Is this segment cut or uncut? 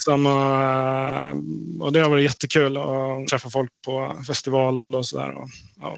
cut